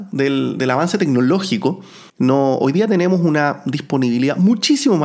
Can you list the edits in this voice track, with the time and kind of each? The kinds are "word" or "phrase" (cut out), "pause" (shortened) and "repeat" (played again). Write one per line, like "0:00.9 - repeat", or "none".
0:02.1 - pause

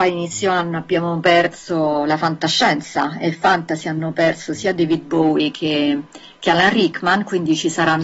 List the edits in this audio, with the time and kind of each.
none

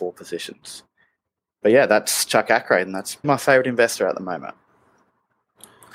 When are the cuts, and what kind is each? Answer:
0:03.2 - word

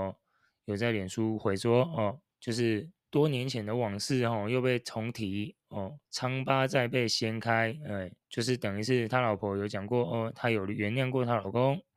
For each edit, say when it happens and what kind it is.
0:02.3 - pause
0:03.0 - pause
0:06.1 - pause
0:08.2 - pause

